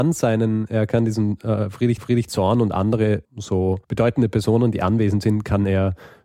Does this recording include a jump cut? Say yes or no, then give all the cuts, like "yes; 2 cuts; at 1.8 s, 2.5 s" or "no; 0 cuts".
yes; 3 cuts; at 2.0 s, 3.2 s, 3.8 s